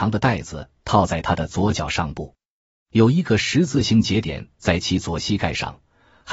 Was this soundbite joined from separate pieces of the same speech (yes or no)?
no